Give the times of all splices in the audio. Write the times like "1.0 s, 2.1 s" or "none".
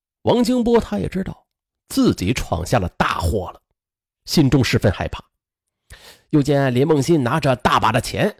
none